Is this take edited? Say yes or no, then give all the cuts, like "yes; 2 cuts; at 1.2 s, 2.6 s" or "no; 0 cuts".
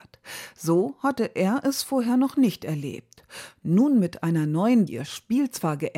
yes; 1 cut; at 4.9 s